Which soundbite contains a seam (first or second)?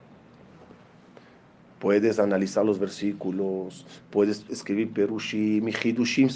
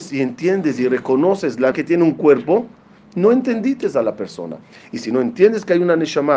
second